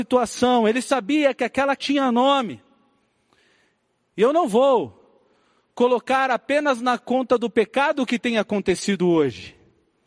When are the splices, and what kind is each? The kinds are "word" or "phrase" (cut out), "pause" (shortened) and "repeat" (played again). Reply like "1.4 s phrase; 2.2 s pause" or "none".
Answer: 1.8 s word